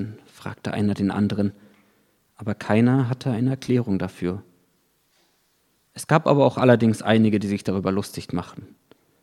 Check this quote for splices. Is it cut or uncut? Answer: uncut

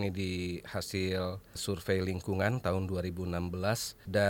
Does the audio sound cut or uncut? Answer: uncut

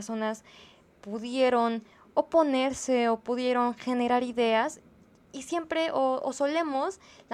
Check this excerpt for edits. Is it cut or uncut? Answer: uncut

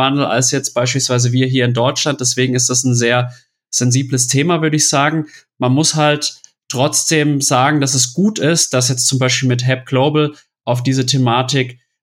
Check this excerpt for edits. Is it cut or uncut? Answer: uncut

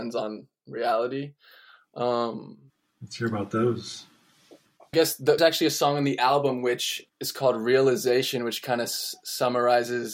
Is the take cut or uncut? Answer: cut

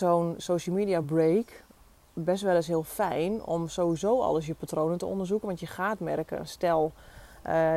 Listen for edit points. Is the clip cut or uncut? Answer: uncut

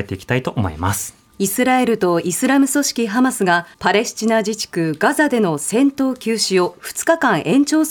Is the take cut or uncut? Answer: cut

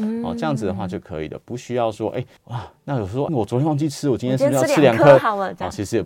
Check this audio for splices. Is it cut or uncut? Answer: cut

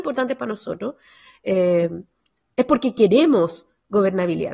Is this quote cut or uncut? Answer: uncut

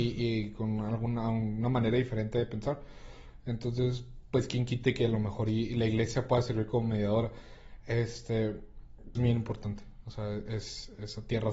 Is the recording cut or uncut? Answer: cut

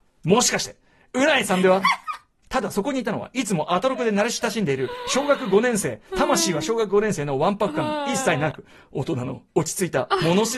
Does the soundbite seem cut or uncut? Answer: uncut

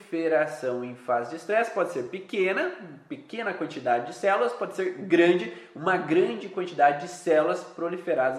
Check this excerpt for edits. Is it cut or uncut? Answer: uncut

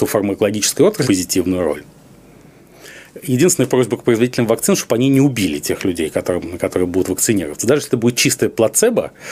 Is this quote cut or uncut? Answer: cut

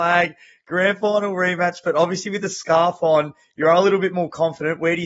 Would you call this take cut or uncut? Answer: uncut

